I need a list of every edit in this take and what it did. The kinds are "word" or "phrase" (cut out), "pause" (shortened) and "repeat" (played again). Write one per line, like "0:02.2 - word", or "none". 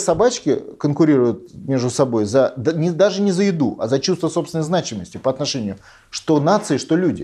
none